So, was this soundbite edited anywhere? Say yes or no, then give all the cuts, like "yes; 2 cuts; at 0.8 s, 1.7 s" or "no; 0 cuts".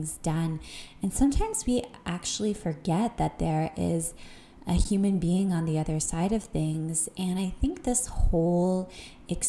no; 0 cuts